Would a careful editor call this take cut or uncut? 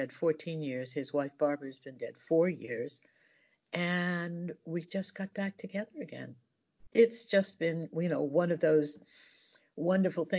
uncut